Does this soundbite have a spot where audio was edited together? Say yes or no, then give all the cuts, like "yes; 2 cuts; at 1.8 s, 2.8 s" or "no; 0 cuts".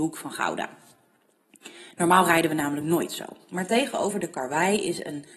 no; 0 cuts